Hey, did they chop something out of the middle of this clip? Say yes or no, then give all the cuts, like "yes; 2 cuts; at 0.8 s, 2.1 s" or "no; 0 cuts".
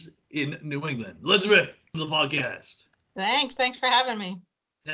yes; 1 cut; at 1.9 s